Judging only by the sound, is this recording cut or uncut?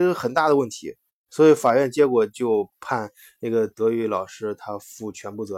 uncut